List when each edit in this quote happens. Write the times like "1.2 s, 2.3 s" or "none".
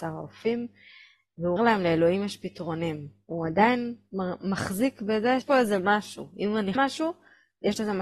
1.6 s, 5.4 s, 6.7 s